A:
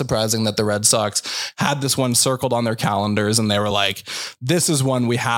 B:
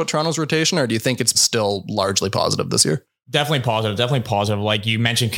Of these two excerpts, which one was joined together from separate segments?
B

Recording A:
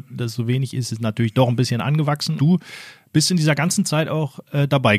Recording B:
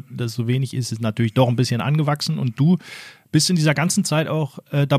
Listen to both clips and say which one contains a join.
A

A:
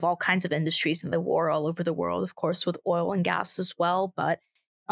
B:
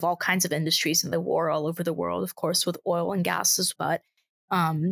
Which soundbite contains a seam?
B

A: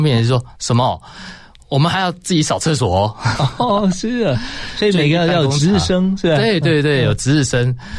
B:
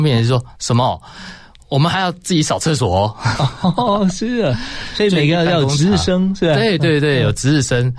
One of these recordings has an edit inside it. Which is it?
A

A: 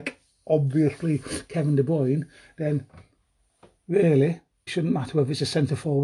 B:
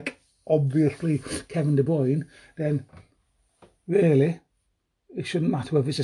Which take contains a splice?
A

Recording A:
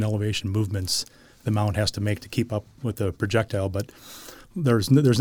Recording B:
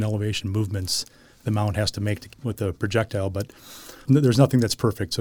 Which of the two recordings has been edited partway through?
B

